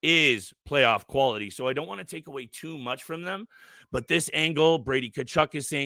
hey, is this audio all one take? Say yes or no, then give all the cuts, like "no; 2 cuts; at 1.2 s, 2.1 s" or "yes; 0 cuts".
yes; 0 cuts